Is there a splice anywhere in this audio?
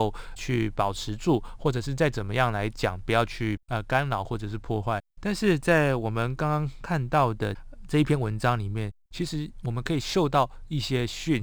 yes; 3 cuts; at 3.6 s, 5.1 s, 9.1 s

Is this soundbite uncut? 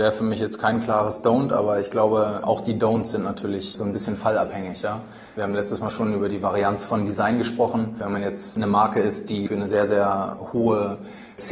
yes; 0 cuts

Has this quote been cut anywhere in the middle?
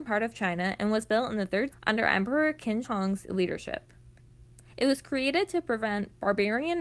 yes; 2 cuts; at 1.7 s, 2.8 s

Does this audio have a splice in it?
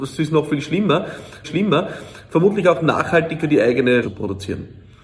yes; 3 cuts; at 1.4 s, 3.4 s, 4.0 s

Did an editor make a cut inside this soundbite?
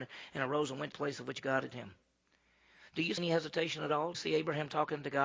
yes; 4 cuts; at 0.9 s, 1.7 s, 3.2 s, 4.1 s

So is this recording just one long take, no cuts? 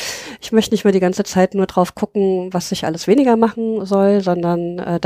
yes; 0 cuts

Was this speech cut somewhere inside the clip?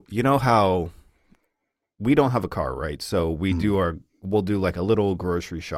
no; 0 cuts

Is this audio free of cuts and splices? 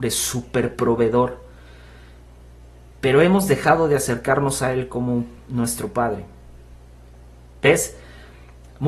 yes; 0 cuts

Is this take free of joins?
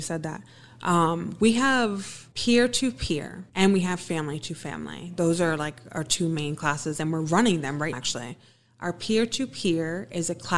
no; 3 cuts; at 2.3 s, 3.5 s, 7.9 s

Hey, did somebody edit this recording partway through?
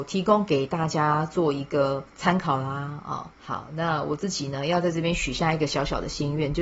yes; 2 cuts; at 2.1 s, 3.3 s

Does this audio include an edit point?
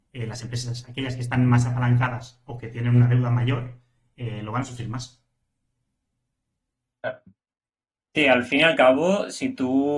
no; 0 cuts

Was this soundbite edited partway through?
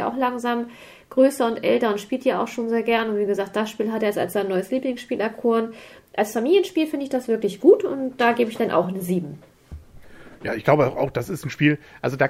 no; 0 cuts

